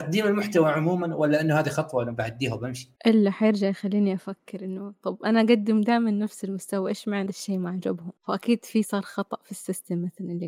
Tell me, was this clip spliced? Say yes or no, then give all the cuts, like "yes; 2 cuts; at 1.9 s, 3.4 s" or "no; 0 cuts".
yes; 3 cuts; at 3.0 s, 7.3 s, 8.2 s